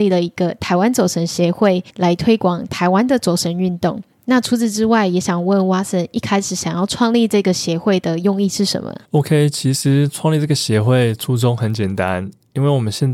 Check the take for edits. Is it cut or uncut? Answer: cut